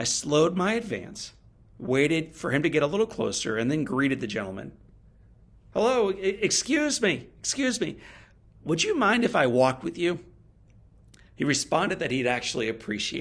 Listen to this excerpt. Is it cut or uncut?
uncut